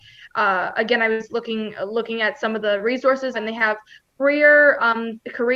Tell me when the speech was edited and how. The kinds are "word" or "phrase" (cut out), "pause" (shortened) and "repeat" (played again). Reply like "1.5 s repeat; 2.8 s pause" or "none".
3.3 s phrase

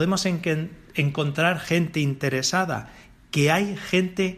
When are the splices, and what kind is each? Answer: none

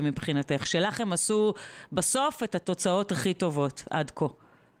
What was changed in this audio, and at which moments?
none

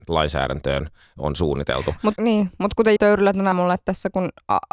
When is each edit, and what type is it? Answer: 2.2 s word; 3.0 s word; 3.5 s phrase

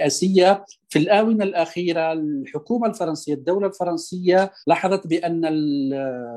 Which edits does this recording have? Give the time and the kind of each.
4.6 s pause

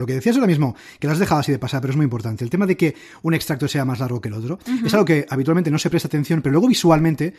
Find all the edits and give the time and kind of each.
none

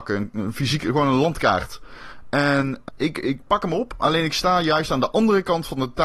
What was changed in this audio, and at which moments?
2.9 s word

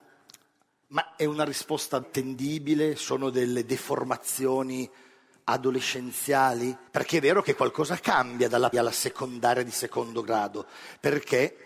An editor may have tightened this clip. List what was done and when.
2.0 s word; 6.9 s pause; 8.7 s word

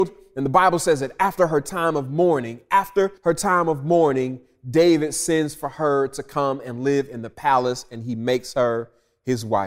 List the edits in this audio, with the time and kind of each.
3.2 s pause

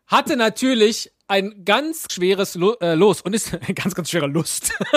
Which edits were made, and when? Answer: 2.1 s word

